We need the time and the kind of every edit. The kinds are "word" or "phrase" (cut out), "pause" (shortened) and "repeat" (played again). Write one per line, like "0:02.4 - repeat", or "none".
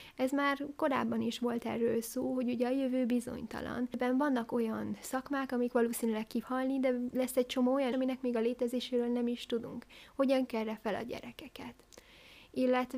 0:06.4 - word
0:07.9 - word
0:10.5 - word